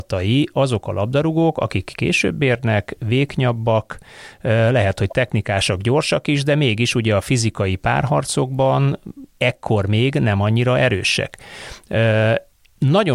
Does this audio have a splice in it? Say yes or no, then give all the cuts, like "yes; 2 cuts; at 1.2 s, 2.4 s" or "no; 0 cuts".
yes; 1 cut; at 9.3 s